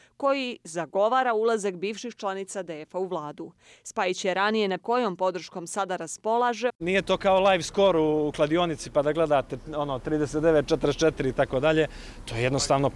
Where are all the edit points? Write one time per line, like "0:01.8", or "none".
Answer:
0:04.8
0:06.7